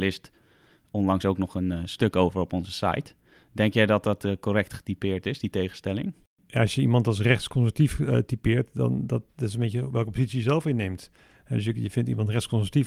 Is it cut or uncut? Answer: uncut